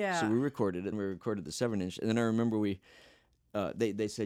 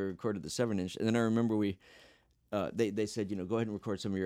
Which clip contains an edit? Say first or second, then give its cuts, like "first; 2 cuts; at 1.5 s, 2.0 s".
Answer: first; 1 cut; at 0.9 s